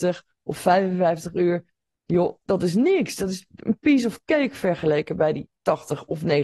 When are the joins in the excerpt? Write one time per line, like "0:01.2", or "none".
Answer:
none